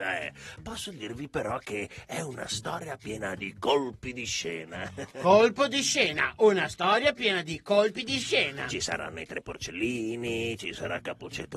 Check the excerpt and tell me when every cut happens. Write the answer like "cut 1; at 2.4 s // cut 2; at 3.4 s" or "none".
none